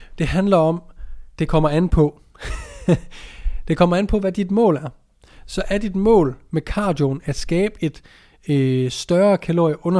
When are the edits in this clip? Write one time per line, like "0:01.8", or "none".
0:01.3